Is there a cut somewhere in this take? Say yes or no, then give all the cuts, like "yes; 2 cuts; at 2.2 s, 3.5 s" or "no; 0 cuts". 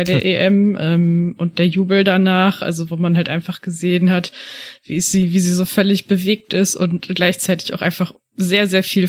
no; 0 cuts